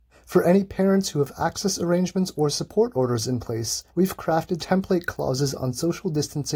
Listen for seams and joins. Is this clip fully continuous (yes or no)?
no